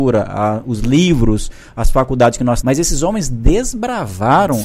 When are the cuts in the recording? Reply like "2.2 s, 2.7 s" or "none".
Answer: 2.6 s